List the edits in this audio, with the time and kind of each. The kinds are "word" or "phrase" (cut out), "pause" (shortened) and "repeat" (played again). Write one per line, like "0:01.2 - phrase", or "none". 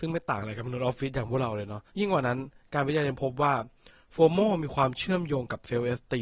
0:01.9 - pause